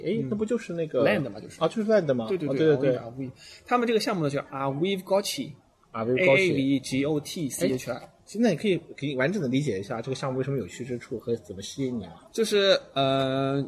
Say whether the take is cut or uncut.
uncut